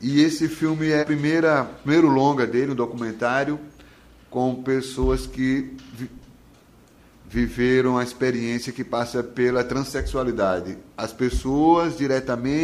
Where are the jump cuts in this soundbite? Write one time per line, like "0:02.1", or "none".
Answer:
0:01.0